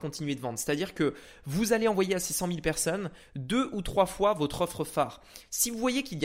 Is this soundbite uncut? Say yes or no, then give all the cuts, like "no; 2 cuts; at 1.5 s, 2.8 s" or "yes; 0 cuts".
yes; 0 cuts